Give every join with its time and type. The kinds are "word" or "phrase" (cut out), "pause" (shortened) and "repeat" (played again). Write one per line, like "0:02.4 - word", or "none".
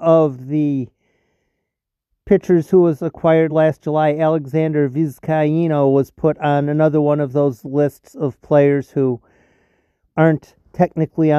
none